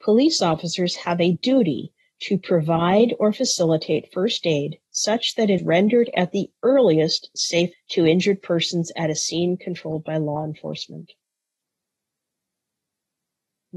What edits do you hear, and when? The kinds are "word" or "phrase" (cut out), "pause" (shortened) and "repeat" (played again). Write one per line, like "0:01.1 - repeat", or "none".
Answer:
0:05.6 - word
0:07.7 - word